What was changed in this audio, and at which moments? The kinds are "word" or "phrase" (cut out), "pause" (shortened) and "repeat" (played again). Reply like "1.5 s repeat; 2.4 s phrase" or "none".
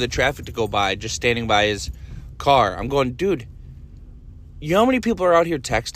none